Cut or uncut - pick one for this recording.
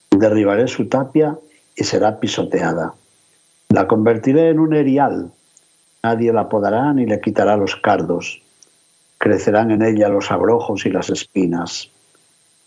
uncut